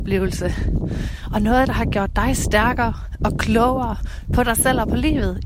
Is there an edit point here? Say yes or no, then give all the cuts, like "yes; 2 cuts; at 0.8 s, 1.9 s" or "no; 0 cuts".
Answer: no; 0 cuts